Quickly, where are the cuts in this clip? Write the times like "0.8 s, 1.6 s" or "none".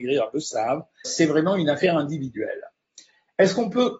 1.0 s